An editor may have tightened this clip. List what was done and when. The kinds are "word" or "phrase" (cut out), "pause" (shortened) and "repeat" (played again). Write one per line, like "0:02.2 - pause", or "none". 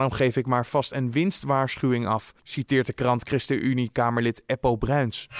0:02.4 - pause

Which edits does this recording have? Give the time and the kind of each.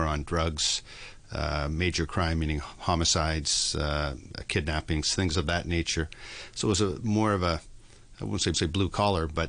0:08.5 - repeat

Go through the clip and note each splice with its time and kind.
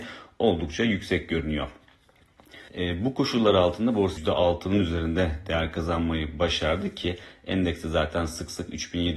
0:02.7 - pause
0:04.2 - phrase

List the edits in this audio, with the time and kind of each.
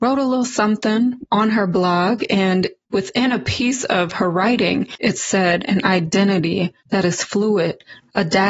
0:06.8 - pause

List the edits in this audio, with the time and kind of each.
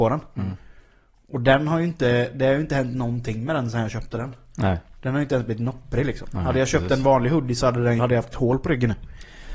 0:08.0 - word

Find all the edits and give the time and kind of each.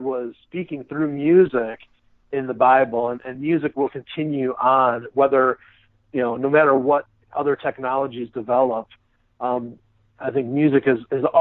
none

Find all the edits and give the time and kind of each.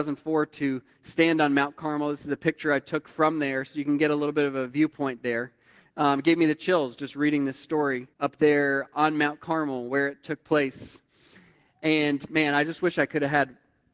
0:08.1 - pause

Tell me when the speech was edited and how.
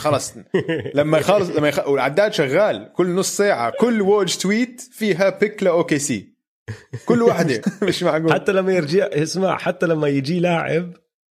0:03.7 - word
0:07.6 - word

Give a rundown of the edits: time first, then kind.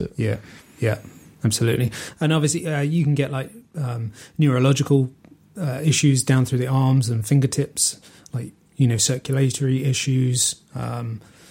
none

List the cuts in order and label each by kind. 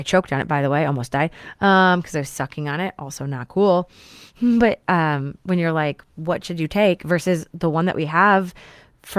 0:06.1 - pause

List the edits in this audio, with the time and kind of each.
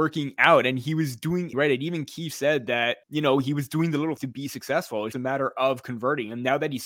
0:01.5 - word
0:03.0 - pause
0:04.2 - word
0:05.1 - word

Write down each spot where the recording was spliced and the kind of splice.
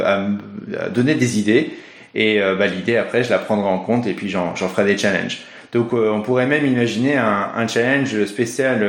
none

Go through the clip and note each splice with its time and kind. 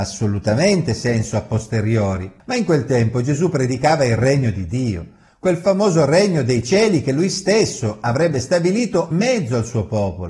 0:09.1 - word

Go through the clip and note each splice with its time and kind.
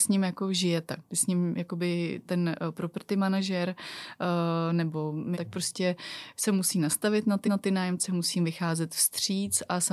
0:02.2 - word
0:05.3 - phrase
0:07.4 - repeat

